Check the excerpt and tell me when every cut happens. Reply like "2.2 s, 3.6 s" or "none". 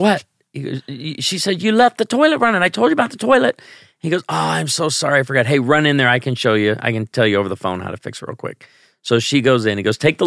none